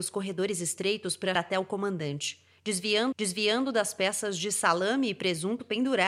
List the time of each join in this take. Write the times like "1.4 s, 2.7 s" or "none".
1.4 s, 3.1 s